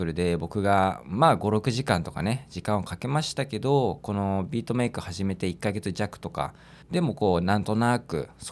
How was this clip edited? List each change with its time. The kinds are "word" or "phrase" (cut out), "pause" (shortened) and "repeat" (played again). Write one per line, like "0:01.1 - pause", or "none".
0:06.8 - pause